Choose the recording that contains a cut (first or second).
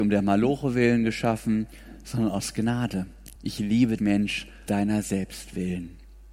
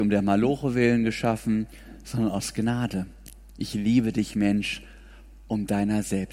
first